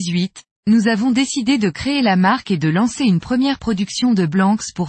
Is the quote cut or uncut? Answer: uncut